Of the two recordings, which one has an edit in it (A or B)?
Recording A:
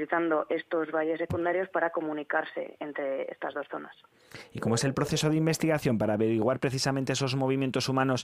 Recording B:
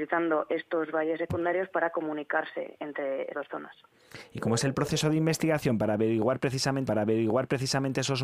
B